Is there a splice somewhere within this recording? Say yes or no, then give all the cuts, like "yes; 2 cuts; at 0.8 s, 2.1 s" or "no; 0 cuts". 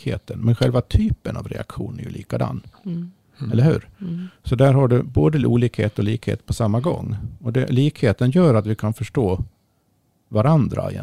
no; 0 cuts